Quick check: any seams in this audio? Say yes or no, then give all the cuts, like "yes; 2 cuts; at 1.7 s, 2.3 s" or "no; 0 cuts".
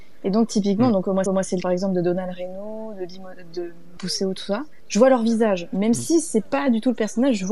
yes; 3 cuts; at 1.3 s, 1.6 s, 4.0 s